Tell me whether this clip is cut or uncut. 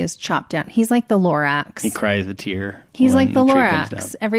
cut